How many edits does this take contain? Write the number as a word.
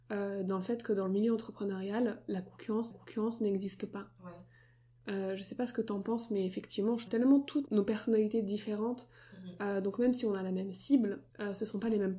four